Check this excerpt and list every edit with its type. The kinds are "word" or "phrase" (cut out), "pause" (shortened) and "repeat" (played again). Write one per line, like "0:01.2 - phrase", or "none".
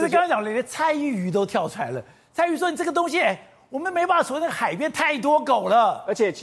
none